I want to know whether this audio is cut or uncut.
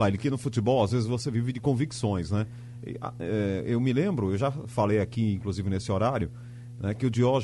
uncut